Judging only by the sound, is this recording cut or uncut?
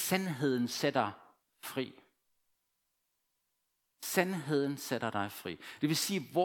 uncut